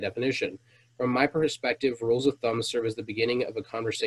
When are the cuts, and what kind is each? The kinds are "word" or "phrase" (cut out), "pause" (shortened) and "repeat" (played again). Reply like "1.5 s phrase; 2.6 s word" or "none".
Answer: none